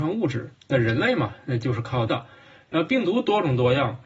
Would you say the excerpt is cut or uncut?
cut